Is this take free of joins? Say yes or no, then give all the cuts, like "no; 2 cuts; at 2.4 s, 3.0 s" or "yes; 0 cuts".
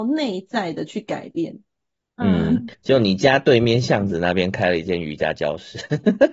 no; 1 cut; at 2.7 s